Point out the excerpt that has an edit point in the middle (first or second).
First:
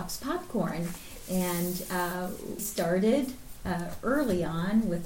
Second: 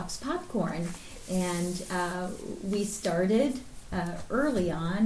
first